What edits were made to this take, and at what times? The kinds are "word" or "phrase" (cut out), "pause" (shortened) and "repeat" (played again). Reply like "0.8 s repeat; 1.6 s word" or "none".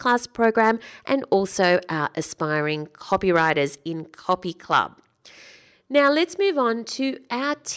none